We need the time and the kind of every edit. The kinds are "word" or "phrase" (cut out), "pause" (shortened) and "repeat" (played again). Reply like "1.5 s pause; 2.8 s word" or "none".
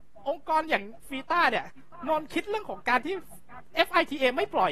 none

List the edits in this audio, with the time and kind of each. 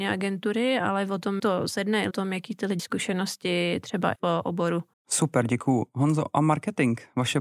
1.4 s word; 2.1 s phrase; 2.8 s word; 4.2 s word; 4.9 s pause

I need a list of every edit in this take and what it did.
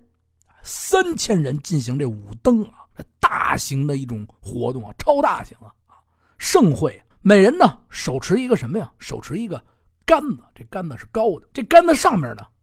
2.9 s pause; 5.8 s pause; 7.1 s pause; 11.5 s pause

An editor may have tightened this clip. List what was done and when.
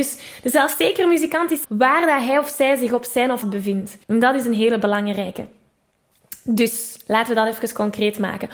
1.6 s phrase; 3.4 s phrase; 4.0 s pause

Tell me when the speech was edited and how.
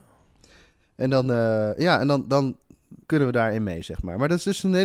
3.0 s pause

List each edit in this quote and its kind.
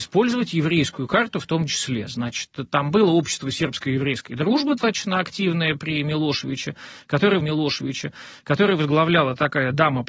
4.8 s word; 7.4 s repeat

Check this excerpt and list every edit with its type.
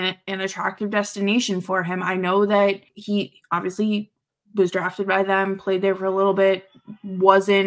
2.9 s pause

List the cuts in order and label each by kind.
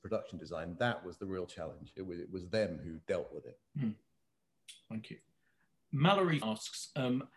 3.0 s pause; 3.7 s pause; 6.4 s word

